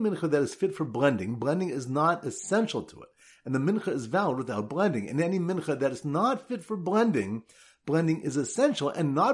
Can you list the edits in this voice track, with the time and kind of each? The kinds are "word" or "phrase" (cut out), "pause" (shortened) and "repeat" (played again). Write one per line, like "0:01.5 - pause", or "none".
none